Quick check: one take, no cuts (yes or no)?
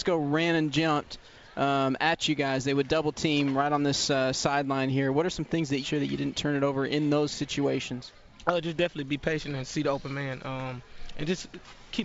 no